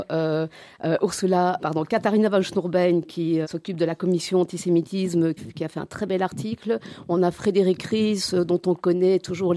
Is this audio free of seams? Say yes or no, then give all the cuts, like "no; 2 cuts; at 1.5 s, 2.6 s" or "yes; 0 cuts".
no; 3 cuts; at 1.6 s, 3.4 s, 5.4 s